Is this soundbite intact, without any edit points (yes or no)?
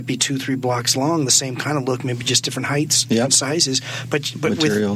yes